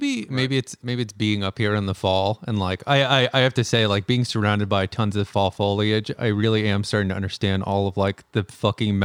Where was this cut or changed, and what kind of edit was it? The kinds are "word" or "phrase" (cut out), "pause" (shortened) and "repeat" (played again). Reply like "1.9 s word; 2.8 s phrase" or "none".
none